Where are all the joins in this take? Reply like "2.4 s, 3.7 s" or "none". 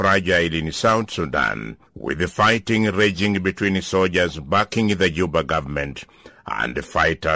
1.9 s